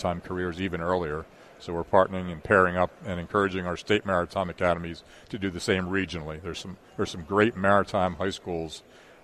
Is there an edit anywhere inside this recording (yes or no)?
no